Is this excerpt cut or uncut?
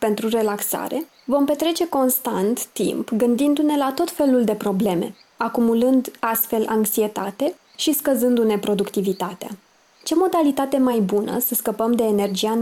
uncut